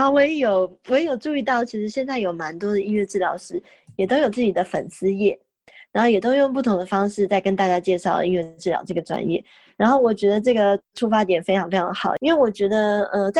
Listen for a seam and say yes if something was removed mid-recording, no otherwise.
no